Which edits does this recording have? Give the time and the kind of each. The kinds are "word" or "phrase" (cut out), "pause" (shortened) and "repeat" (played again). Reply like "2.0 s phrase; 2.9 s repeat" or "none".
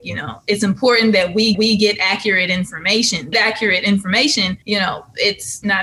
1.5 s repeat; 3.3 s phrase; 4.6 s pause